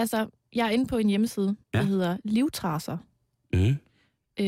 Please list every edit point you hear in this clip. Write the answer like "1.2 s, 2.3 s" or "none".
1.6 s